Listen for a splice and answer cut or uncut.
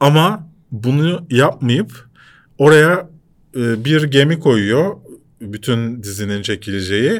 uncut